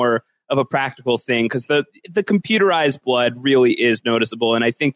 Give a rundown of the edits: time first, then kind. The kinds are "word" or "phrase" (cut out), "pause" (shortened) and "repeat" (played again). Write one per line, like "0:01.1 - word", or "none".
none